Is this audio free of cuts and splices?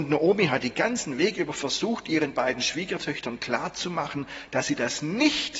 yes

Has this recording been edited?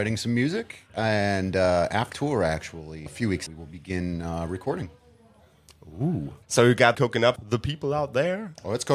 yes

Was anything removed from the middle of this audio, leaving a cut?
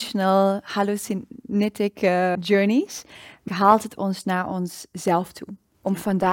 yes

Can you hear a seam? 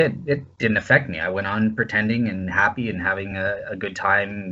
no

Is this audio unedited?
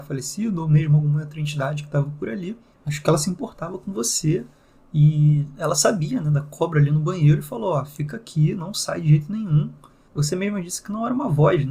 yes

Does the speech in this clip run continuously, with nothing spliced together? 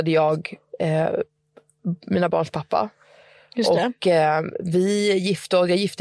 yes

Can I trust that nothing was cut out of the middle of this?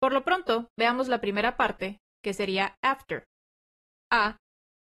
yes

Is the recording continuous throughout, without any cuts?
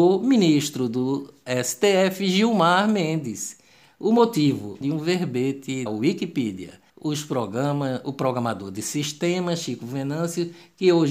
no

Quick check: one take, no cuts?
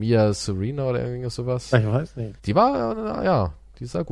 no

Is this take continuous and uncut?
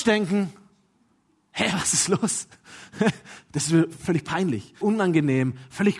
no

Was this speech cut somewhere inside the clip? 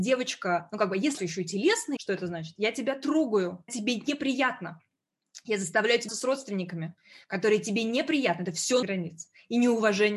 yes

